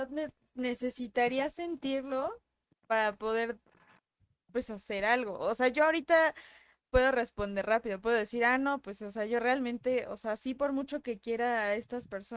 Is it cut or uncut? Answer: uncut